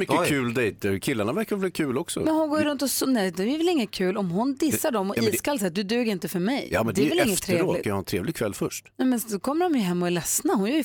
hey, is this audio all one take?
no; 1 cut; at 7.8 s

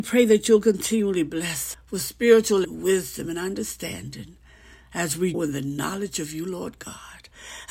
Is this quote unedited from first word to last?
no; 3 cuts; at 1.7 s, 2.6 s, 5.3 s

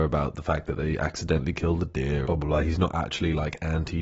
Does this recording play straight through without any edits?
no; 1 cut; at 2.3 s

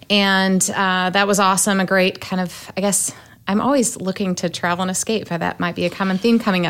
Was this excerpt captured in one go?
yes; 0 cuts

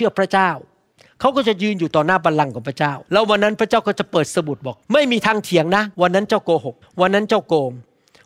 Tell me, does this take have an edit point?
yes; 4 cuts; at 3.1 s, 4.8 s, 5.9 s, 6.8 s

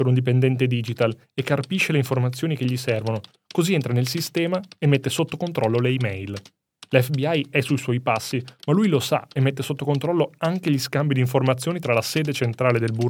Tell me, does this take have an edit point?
no; 0 cuts

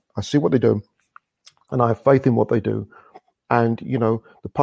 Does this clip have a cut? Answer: no; 0 cuts

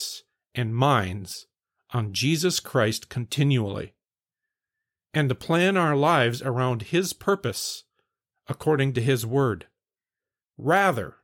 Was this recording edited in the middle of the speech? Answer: no; 0 cuts

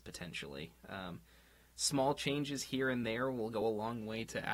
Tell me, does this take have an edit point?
no; 0 cuts

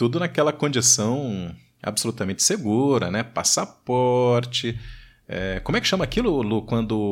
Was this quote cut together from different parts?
no; 0 cuts

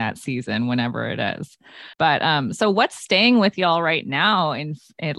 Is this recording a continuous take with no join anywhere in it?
no; 1 cut; at 1.9 s

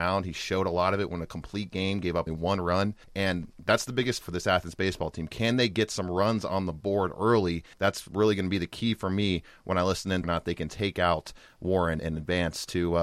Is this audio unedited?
no; 6 cuts; at 2.3 s, 3.0 s, 4.2 s, 7.7 s, 10.2 s, 12.0 s

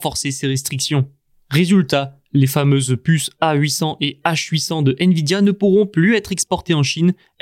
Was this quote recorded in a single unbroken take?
yes; 0 cuts

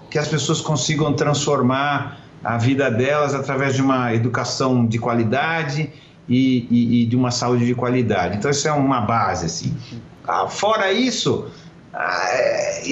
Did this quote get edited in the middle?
no; 0 cuts

